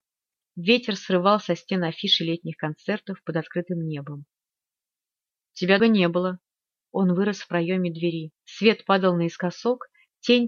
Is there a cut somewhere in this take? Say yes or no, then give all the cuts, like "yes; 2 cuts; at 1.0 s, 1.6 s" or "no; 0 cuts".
yes; 2 cuts; at 5.8 s, 8.4 s